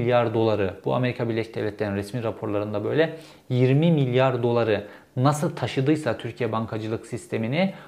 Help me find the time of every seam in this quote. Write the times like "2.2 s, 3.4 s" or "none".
none